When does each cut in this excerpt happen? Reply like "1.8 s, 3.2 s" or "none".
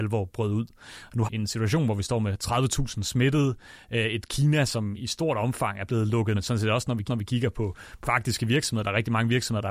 1.2 s, 5.0 s, 6.3 s, 7.1 s, 8.0 s